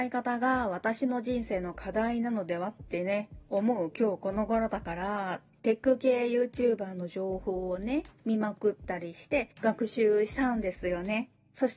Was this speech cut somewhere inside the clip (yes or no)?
no